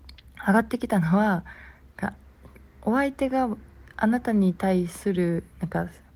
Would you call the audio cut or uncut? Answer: uncut